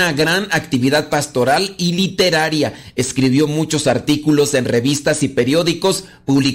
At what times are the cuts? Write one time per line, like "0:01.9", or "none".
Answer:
none